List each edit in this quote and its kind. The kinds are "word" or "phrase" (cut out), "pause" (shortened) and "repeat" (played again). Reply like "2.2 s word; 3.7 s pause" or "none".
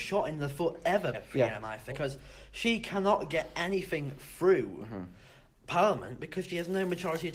1.1 s word; 1.9 s word